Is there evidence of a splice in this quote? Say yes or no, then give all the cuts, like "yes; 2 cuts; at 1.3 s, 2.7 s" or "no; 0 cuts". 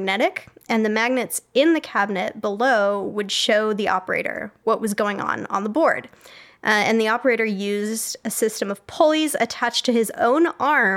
no; 0 cuts